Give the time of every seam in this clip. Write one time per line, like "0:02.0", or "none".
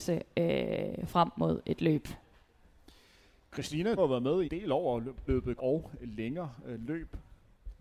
0:04.0
0:04.4
0:05.3
0:05.6